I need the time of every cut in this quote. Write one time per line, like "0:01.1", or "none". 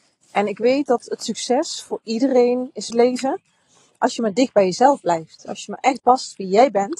0:02.9
0:06.0